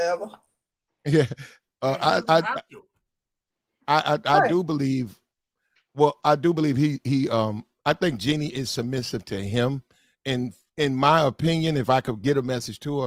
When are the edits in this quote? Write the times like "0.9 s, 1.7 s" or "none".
none